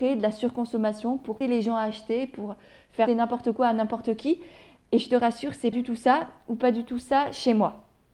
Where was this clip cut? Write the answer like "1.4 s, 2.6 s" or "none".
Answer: 1.4 s, 3.1 s, 5.7 s